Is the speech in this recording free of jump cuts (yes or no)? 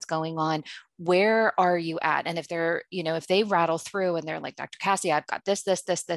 yes